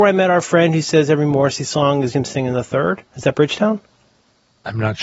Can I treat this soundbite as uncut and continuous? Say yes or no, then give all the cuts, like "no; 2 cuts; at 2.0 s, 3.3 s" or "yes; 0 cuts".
no; 2 cuts; at 2.1 s, 3.1 s